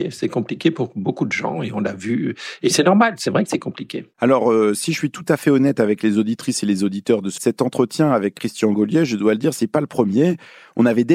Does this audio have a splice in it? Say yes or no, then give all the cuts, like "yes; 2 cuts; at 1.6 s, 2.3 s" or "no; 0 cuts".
yes; 2 cuts; at 4.1 s, 7.4 s